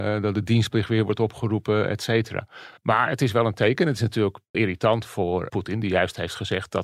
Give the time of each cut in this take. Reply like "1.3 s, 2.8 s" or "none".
2.8 s, 4.5 s, 5.5 s